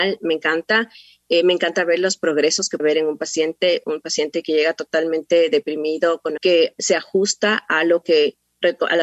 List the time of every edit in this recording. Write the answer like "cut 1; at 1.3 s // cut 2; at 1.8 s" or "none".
cut 1; at 2.8 s // cut 2; at 6.4 s